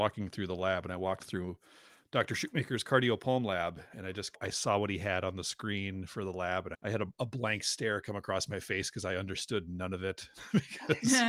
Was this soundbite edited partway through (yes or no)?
no